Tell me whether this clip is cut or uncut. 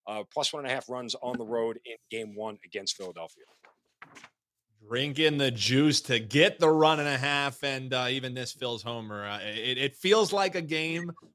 uncut